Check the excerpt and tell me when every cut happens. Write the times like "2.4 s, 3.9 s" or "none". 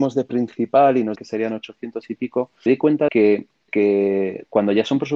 1.2 s, 2.7 s, 3.1 s, 3.7 s